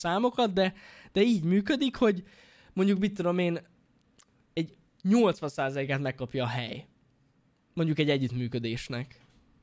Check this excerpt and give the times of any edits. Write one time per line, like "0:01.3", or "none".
none